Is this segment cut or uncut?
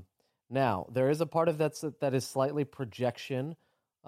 uncut